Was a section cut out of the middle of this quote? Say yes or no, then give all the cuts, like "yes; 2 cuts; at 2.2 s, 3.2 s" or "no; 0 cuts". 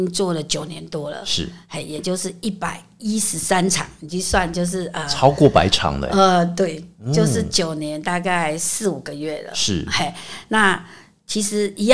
no; 0 cuts